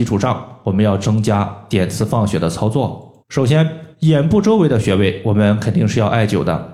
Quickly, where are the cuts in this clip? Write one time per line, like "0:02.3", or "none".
0:03.2
0:03.9

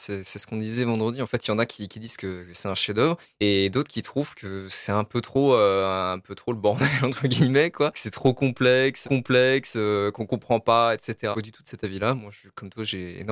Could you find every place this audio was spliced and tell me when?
0:03.2
0:07.9
0:09.0
0:11.3

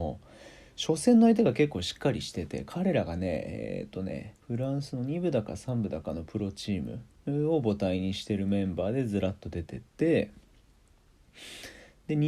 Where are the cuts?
0:04.4

